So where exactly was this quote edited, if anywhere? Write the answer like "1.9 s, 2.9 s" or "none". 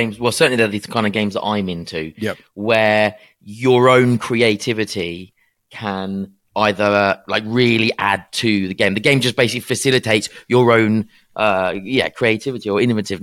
none